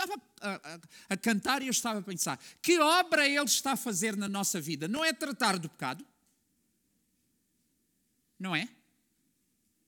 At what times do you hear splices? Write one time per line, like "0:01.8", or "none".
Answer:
none

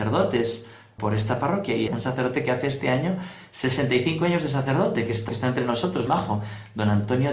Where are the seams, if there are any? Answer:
0:01.0
0:01.9
0:05.3
0:06.1

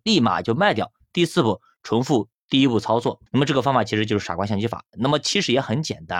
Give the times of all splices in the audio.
0:03.3

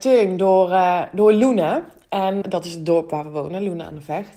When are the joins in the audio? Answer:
0:02.4

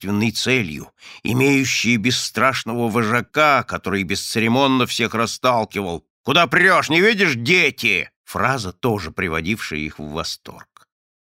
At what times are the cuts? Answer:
0:06.1
0:08.1

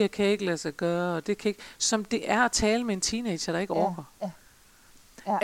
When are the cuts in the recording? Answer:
none

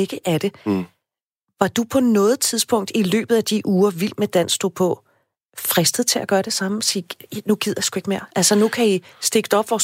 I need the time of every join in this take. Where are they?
none

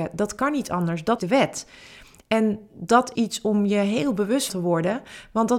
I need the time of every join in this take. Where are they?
0:01.2
0:03.1
0:04.5

